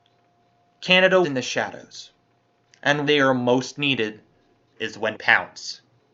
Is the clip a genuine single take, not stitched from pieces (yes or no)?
no